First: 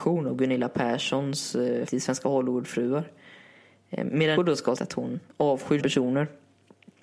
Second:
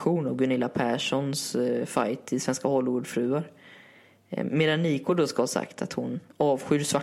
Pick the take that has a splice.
first; 4 cuts; at 1.9 s, 4.4 s, 4.8 s, 5.8 s

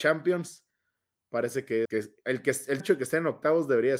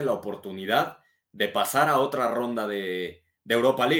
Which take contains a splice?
first; 2 cuts; at 1.9 s, 2.8 s

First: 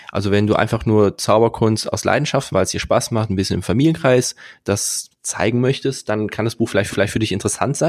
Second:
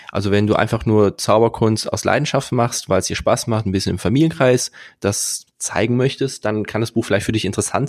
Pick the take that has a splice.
first; 2 cuts; at 2.5 s, 6.9 s

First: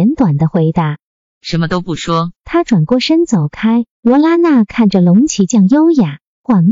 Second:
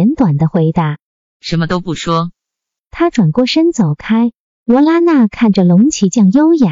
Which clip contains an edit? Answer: first; 2 cuts; at 2.3 s, 3.9 s

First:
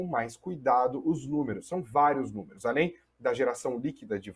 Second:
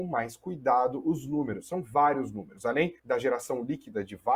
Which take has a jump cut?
second; 1 cut; at 3.0 s

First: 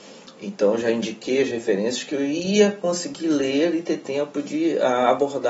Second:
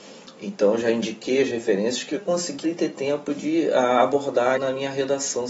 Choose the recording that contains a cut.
second; 3 cuts; at 2.2 s, 2.6 s, 4.6 s

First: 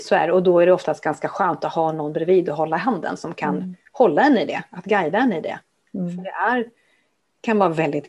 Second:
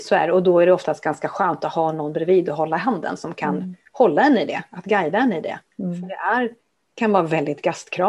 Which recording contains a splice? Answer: second; 2 cuts; at 5.7 s, 6.6 s

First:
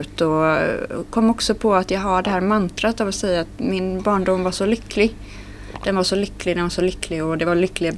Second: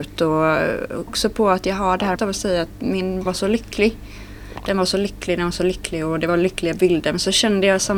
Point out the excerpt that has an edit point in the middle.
second; 3 cuts; at 1.1 s, 2.2 s, 3.3 s

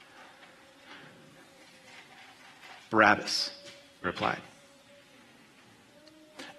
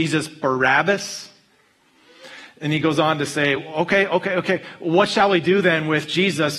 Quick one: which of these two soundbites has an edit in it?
first; 1 cut; at 4.0 s

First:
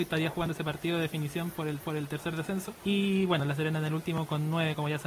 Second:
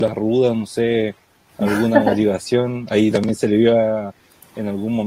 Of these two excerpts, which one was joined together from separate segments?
first; 2 cuts; at 1.8 s, 2.8 s

